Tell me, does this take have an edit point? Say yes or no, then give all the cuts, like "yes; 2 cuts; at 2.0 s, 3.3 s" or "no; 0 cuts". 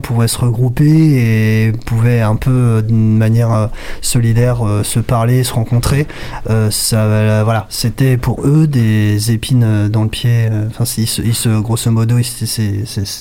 no; 0 cuts